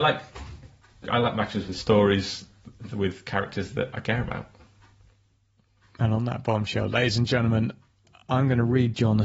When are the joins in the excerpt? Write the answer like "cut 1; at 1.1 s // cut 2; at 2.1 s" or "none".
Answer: none